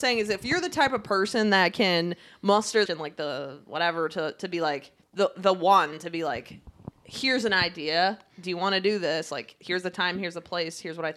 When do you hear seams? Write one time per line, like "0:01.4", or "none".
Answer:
0:02.9
0:05.0